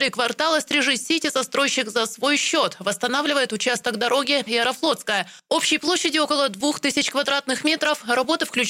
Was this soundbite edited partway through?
yes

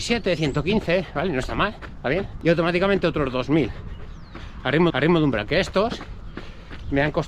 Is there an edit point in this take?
yes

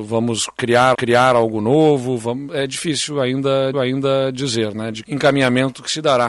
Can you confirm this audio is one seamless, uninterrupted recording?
no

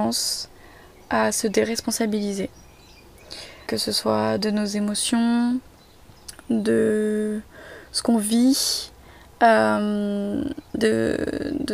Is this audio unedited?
no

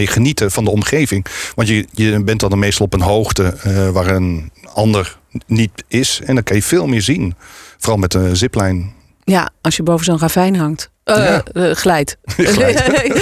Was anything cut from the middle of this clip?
no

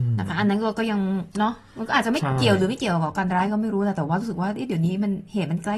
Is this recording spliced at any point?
yes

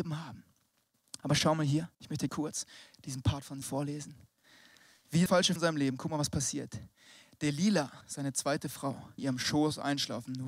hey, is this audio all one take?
no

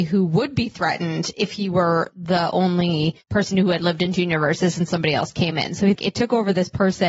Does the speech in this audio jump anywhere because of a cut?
yes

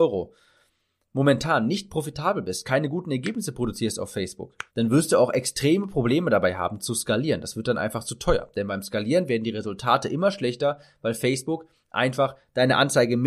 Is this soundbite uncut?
no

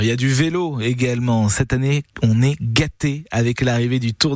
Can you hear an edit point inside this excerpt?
yes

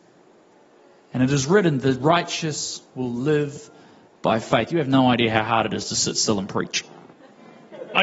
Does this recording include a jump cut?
no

